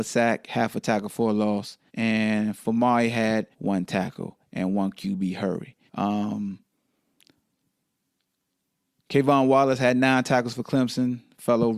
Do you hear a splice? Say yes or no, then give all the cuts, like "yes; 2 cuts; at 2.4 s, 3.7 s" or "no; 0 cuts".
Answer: yes; 3 cuts; at 1.9 s, 3.5 s, 5.9 s